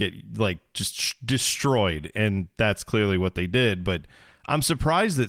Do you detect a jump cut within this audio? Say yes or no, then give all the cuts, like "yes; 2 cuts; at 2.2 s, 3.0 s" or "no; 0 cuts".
no; 0 cuts